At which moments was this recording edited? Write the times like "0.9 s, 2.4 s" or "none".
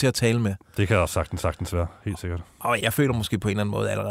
1.4 s, 2.8 s